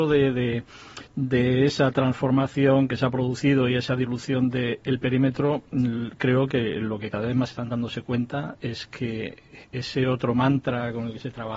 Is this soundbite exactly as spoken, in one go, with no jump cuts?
no; 2 cuts; at 1.1 s, 7.5 s

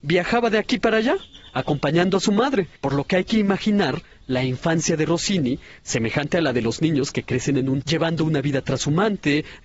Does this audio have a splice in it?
yes; 2 cuts; at 2.8 s, 7.8 s

